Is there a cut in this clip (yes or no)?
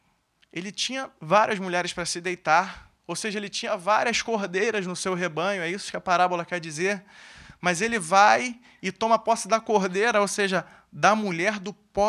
yes